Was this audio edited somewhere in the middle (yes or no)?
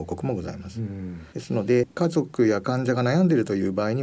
yes